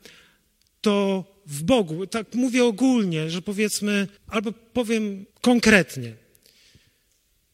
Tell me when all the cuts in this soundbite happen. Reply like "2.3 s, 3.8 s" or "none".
4.2 s, 5.3 s